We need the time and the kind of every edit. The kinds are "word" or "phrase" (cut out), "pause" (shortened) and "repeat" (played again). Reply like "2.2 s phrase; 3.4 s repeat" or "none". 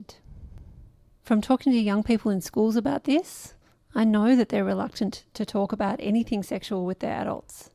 none